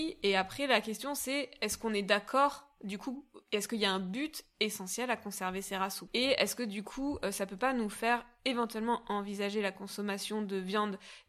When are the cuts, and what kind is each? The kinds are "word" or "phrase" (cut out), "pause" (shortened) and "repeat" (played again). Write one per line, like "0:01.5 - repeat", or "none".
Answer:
0:06.1 - word